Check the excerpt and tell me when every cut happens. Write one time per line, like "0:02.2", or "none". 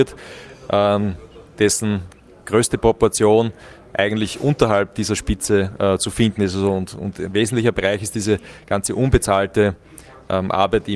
none